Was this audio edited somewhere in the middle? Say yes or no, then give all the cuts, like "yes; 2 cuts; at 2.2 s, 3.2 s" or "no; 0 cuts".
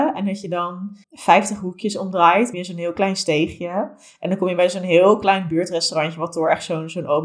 yes; 2 cuts; at 1.0 s, 2.5 s